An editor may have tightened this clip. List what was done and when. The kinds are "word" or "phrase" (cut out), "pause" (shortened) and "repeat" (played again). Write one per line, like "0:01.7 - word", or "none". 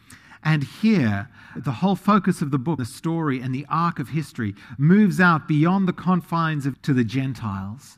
0:01.6 - word
0:02.8 - word
0:06.7 - word